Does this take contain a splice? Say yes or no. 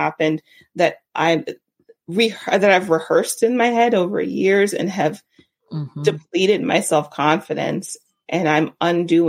no